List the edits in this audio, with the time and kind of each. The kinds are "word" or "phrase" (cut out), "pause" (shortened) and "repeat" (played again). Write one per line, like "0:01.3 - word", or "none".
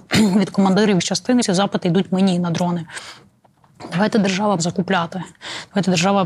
0:01.0 - word
0:01.4 - phrase
0:04.6 - word